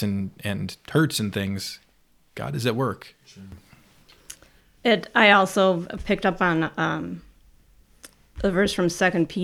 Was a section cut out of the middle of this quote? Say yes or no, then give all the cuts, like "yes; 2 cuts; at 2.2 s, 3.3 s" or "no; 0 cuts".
no; 0 cuts